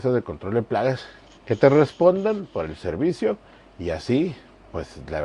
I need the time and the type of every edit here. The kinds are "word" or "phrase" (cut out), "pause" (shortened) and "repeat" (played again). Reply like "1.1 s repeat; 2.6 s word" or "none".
1.3 s word